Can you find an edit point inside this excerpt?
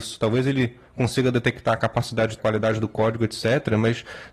yes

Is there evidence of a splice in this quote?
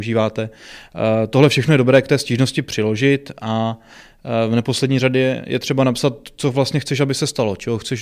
no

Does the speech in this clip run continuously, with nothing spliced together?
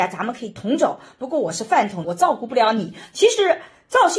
no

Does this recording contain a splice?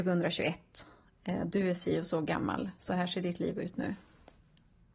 no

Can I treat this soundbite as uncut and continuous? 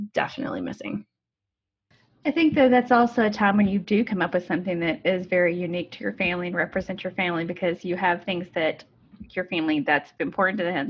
yes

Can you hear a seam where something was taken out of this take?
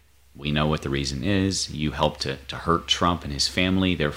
yes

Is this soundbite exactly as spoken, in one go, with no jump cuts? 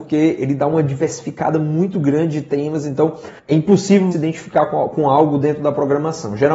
no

